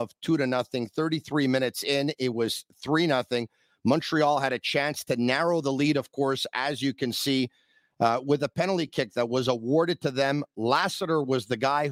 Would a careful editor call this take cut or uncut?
uncut